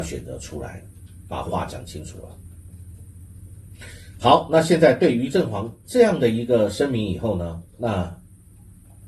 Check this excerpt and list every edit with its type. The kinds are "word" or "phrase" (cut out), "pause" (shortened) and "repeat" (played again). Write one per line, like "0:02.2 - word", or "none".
0:07.7 - pause